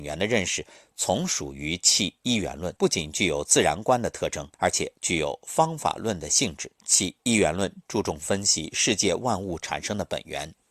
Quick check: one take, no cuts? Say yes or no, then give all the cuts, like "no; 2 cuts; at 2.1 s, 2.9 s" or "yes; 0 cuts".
no; 4 cuts; at 2.8 s, 4.5 s, 5.0 s, 6.8 s